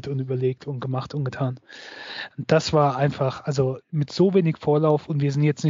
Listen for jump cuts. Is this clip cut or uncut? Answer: cut